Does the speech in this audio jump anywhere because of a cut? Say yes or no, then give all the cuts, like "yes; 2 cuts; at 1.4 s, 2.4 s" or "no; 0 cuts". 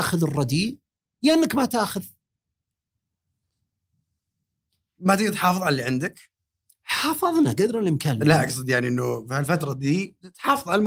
no; 0 cuts